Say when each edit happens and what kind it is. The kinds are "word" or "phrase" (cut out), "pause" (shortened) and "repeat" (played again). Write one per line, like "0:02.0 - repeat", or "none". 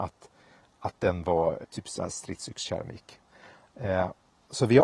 0:01.6 - word